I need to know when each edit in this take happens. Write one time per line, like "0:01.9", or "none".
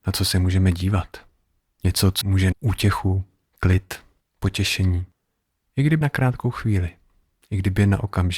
0:02.2
0:02.5
0:04.2
0:06.0